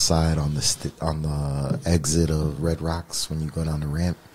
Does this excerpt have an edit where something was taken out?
no; 0 cuts

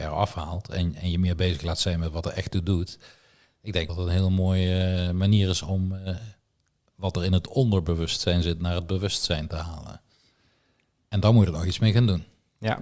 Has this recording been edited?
yes; 1 cut; at 3.9 s

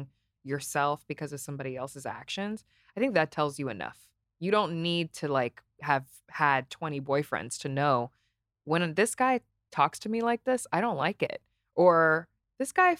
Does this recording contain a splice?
no; 0 cuts

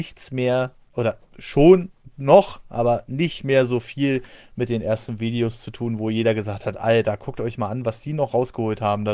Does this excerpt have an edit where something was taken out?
no; 0 cuts

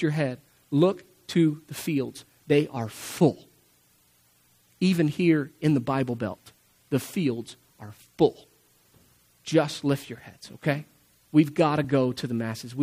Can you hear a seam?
no; 0 cuts

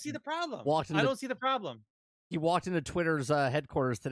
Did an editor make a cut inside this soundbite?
no; 0 cuts

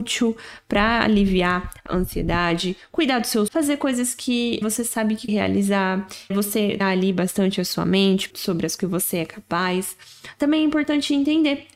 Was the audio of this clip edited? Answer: yes; 8 cuts; at 1.9 s, 3.5 s, 4.6 s, 5.3 s, 6.3 s, 6.8 s, 8.3 s, 8.8 s

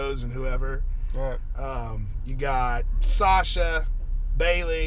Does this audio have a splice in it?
no; 0 cuts

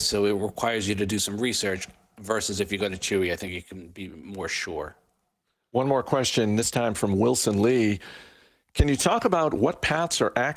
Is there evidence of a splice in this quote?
no; 0 cuts

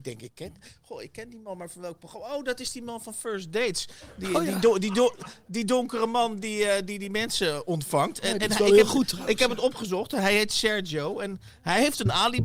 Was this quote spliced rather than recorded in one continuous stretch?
no; 0 cuts

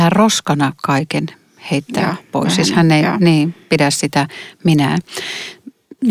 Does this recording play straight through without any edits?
yes; 0 cuts

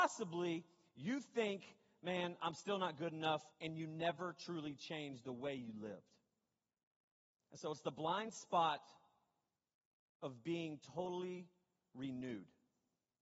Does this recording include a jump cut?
yes; 1 cut; at 3.5 s

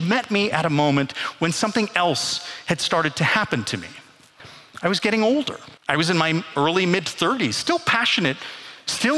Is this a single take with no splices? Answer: no; 1 cut; at 5.8 s

